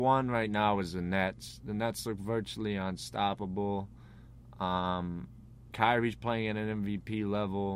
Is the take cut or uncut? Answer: cut